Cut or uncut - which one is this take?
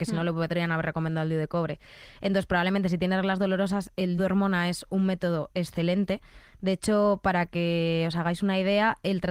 cut